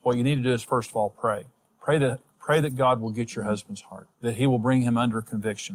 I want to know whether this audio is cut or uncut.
cut